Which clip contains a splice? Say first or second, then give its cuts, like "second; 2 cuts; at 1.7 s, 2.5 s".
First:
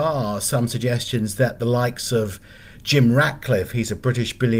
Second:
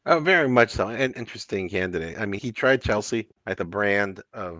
second; 4 cuts; at 1.1 s, 2.4 s, 2.8 s, 3.6 s